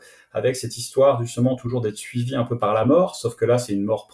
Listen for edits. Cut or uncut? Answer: uncut